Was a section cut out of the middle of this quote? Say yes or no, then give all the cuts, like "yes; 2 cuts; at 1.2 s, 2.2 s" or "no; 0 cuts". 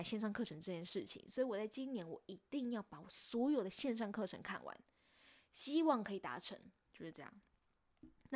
yes; 1 cut; at 6.8 s